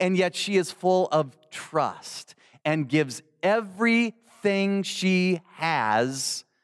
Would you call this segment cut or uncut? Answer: uncut